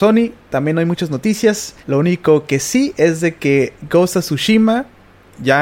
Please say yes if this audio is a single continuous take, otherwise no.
no